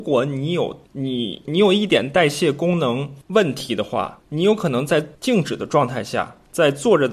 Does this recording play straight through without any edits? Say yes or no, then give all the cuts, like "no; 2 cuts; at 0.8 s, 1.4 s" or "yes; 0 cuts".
no; 1 cut; at 5.1 s